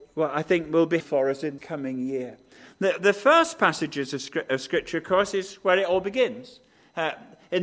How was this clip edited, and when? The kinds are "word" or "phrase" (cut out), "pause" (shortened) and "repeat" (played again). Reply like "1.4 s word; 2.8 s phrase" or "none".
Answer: 1.0 s word; 1.6 s word